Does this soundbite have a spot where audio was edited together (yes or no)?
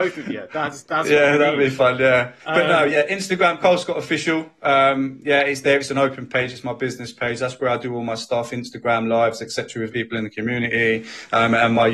yes